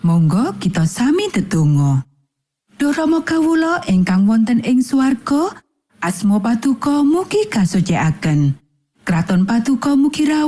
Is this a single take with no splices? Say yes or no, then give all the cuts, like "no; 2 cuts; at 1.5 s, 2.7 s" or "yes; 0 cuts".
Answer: yes; 0 cuts